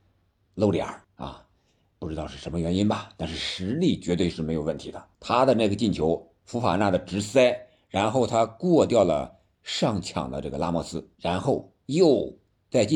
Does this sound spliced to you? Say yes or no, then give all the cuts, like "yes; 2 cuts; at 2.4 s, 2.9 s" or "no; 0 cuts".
yes; 3 cuts; at 1.0 s, 5.1 s, 11.1 s